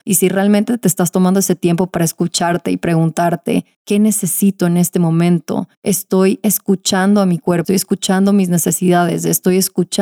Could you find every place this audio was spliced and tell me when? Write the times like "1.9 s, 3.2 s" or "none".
7.6 s